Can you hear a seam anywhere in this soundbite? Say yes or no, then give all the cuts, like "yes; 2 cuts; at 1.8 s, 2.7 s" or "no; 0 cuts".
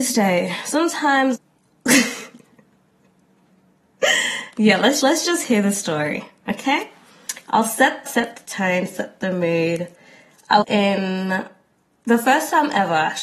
yes; 4 cuts; at 1.4 s, 5.0 s, 8.1 s, 10.6 s